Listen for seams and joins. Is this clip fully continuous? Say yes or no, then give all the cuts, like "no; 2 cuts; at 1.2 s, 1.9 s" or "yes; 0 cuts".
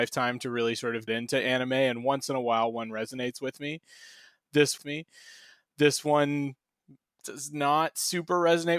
no; 2 cuts; at 1.1 s, 4.8 s